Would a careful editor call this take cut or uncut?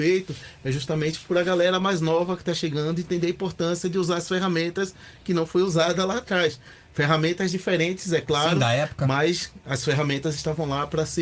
uncut